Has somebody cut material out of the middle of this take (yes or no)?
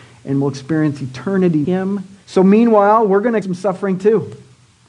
yes